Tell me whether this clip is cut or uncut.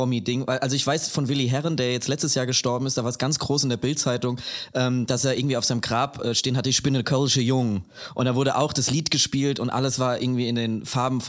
uncut